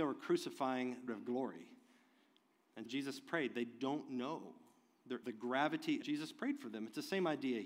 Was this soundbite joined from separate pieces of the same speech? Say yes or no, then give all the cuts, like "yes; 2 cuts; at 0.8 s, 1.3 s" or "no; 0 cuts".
yes; 4 cuts; at 1.1 s, 2.9 s, 5.2 s, 6.0 s